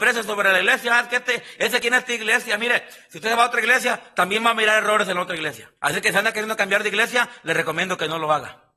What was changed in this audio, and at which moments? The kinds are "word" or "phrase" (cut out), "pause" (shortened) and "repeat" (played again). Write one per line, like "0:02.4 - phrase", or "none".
0:05.8 - pause